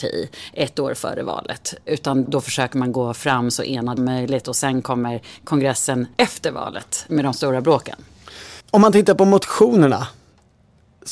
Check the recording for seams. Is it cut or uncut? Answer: cut